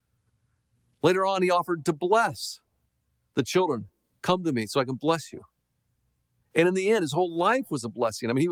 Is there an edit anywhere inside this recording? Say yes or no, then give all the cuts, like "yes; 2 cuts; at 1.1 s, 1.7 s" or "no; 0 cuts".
no; 0 cuts